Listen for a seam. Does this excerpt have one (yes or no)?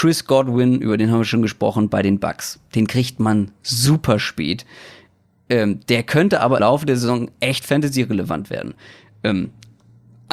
yes